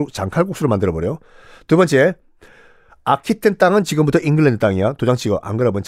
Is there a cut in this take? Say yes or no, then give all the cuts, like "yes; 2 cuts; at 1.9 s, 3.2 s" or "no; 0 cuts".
no; 0 cuts